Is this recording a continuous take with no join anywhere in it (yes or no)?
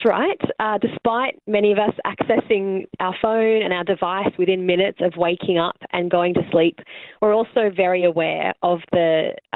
yes